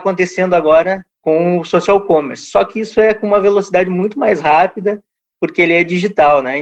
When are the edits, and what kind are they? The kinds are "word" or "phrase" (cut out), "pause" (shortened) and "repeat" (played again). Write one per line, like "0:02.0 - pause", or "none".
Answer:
0:01.1 - pause